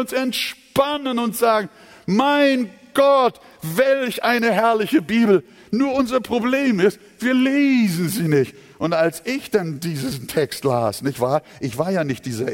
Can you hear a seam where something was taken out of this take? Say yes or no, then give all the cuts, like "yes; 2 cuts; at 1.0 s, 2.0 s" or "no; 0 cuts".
no; 0 cuts